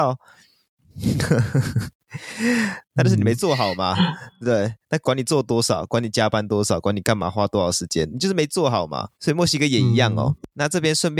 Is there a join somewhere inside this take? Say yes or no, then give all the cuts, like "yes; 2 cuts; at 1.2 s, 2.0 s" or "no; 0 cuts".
yes; 1 cut; at 9.1 s